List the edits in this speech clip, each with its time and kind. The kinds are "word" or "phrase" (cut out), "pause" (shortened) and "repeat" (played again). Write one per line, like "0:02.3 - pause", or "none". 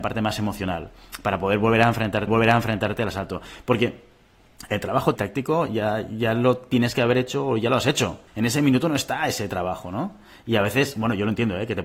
0:02.3 - repeat
0:05.2 - phrase
0:08.3 - pause